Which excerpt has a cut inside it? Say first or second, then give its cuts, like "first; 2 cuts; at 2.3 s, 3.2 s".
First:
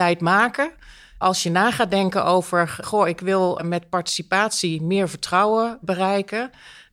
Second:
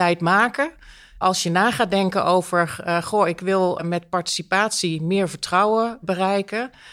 first; 1 cut; at 2.8 s